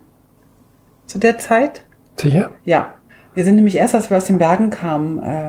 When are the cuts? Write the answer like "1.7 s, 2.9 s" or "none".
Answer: 3.1 s